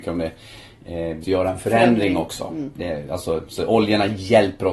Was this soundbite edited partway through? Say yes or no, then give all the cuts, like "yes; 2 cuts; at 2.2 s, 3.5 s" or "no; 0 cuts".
yes; 1 cut; at 1.2 s